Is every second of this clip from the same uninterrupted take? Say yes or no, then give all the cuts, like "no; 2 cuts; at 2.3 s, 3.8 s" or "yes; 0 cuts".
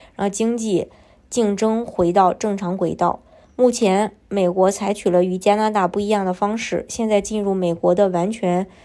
yes; 0 cuts